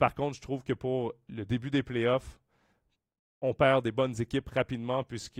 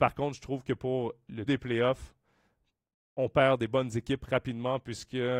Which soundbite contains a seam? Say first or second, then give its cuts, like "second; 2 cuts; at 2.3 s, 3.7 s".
second; 1 cut; at 1.5 s